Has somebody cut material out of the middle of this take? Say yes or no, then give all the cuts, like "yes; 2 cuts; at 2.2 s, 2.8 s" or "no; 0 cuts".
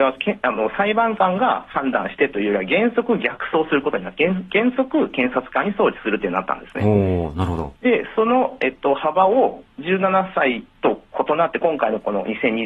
yes; 1 cut; at 7.8 s